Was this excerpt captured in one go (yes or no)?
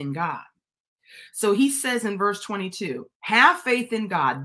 no